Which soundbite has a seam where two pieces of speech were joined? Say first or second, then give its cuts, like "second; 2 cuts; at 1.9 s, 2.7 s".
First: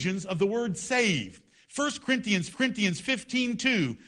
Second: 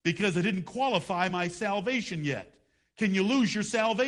first; 1 cut; at 2.5 s